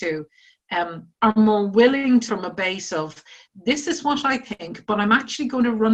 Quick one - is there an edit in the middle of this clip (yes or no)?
yes